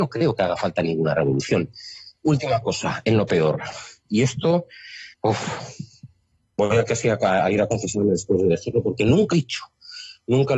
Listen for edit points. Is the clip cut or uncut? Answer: cut